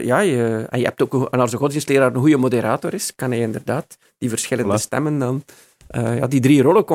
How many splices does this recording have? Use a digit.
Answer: 0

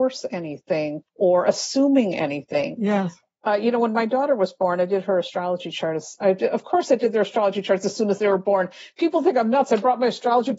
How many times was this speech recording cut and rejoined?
1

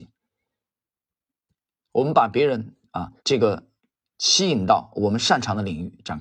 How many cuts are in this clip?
2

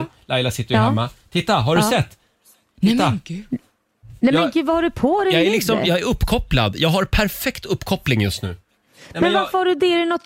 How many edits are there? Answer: 0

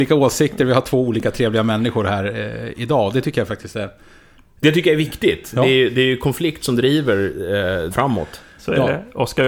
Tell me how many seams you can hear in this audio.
1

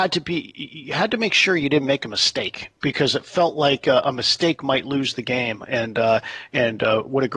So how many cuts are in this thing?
0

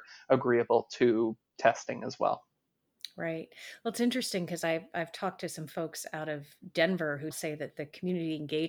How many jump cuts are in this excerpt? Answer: 1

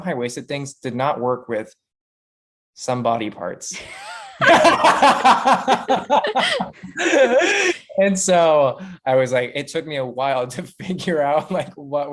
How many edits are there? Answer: 0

